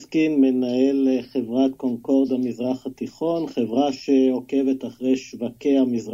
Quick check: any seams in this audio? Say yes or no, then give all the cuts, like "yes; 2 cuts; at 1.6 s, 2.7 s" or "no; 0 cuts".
no; 0 cuts